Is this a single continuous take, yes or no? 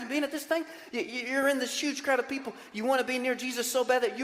yes